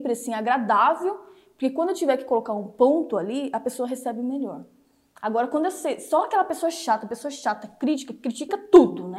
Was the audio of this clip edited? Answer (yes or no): no